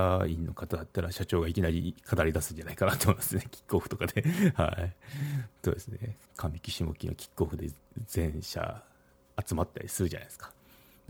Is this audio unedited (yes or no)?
no